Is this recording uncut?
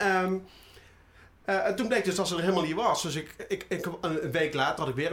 yes; 0 cuts

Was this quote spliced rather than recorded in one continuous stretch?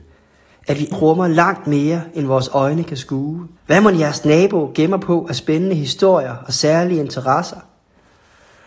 yes; 2 cuts; at 0.9 s, 3.6 s

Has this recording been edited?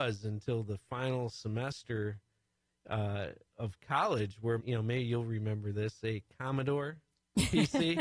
yes; 1 cut; at 4.6 s

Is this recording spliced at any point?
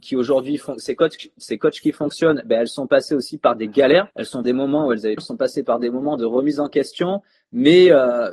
yes; 3 cuts; at 4.1 s, 4.4 s, 5.2 s

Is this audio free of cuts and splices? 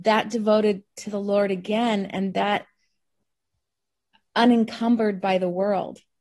yes; 0 cuts

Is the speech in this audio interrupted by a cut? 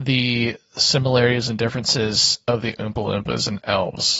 no; 0 cuts

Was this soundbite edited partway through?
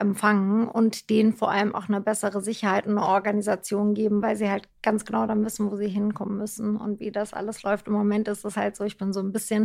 no; 0 cuts

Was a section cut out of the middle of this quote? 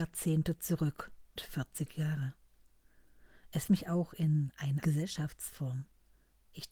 yes; 3 cuts; at 1.4 s, 3.7 s, 4.8 s

